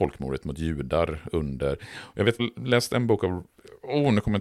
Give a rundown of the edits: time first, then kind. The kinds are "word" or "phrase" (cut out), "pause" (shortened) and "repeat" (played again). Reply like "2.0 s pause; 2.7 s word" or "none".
2.4 s word